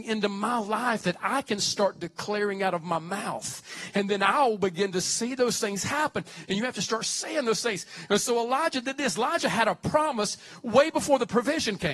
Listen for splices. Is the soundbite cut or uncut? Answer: uncut